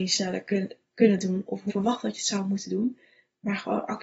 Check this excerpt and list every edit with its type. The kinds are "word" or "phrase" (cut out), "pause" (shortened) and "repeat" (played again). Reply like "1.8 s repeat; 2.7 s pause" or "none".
1.7 s word